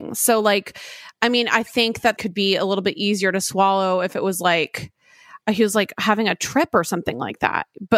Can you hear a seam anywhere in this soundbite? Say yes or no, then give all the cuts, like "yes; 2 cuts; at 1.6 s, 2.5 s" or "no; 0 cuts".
yes; 1 cut; at 2.2 s